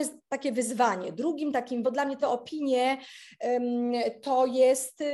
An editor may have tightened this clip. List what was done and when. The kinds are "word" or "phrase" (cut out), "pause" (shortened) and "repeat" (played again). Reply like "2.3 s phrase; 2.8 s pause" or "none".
1.8 s word; 2.2 s word